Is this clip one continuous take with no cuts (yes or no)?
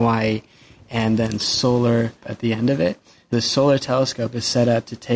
no